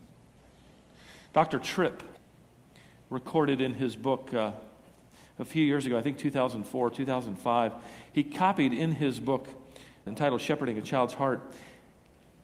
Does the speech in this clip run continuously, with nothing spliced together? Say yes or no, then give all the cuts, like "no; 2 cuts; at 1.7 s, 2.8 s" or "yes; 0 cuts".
yes; 0 cuts